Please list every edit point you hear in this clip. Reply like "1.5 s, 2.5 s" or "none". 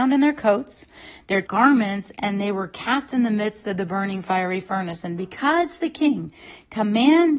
1.4 s, 5.2 s